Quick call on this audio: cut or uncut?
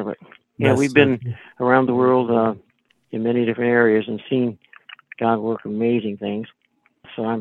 uncut